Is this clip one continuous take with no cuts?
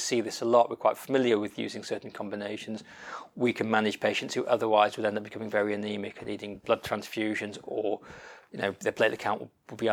yes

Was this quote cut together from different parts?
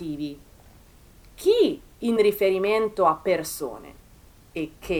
no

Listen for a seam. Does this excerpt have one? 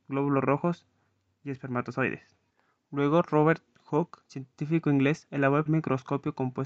yes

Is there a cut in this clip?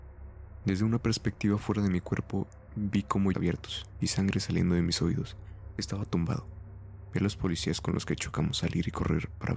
yes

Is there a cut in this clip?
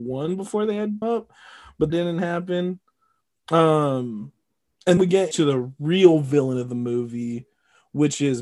yes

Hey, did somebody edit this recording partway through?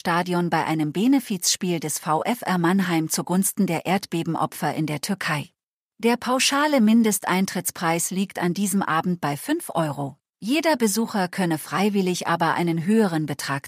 yes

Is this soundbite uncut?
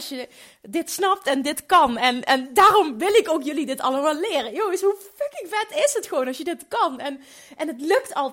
yes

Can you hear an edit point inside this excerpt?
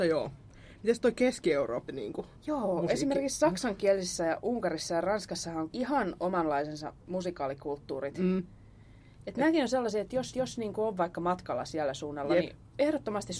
yes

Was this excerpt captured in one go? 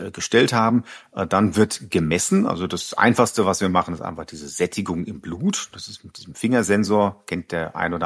yes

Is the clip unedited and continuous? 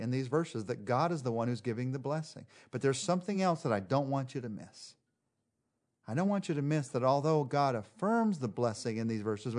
yes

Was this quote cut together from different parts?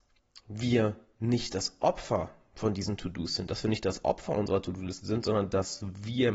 no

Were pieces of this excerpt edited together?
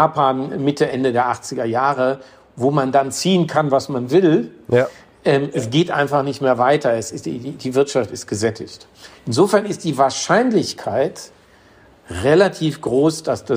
no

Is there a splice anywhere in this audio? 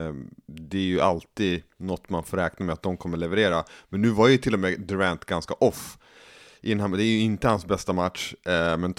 no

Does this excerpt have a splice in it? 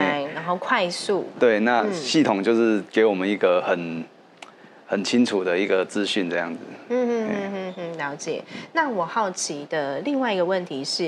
no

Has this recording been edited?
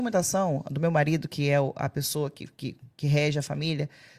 no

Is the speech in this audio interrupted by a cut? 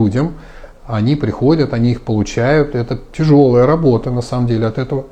no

